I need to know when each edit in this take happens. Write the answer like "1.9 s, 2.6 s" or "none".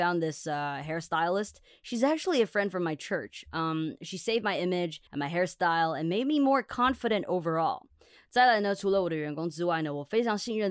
5.1 s